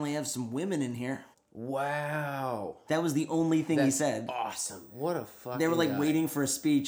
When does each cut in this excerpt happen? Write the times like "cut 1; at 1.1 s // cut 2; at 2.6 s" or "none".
cut 1; at 1.3 s